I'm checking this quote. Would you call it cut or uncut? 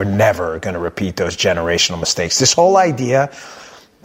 uncut